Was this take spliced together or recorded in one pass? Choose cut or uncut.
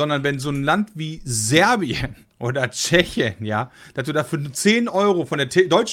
uncut